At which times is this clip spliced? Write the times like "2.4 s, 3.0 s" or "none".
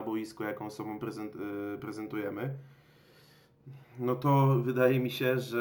none